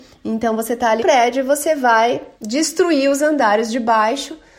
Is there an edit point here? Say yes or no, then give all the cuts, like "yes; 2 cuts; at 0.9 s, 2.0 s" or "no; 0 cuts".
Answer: yes; 2 cuts; at 1.0 s, 2.3 s